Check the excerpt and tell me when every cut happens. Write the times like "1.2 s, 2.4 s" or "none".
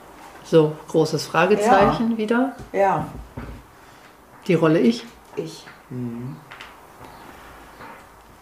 none